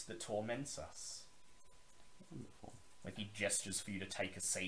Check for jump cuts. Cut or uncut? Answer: cut